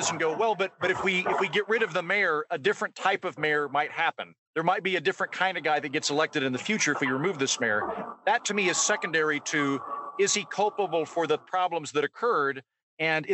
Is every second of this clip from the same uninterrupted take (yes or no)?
no